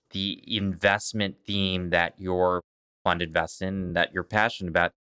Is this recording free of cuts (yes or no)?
yes